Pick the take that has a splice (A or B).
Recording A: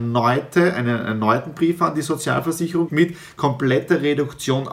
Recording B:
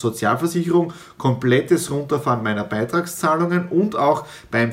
A